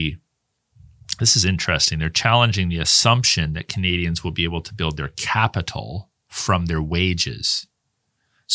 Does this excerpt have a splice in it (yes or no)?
no